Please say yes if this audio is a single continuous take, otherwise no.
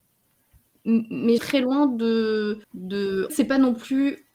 no